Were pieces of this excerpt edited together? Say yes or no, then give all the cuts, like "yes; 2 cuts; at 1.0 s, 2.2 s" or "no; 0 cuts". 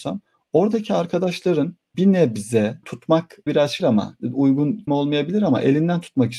yes; 5 cuts; at 1.9 s, 2.8 s, 3.5 s, 3.8 s, 4.9 s